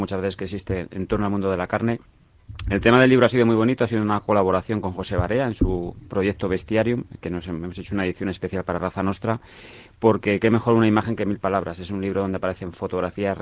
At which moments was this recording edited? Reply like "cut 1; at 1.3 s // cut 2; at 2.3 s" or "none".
none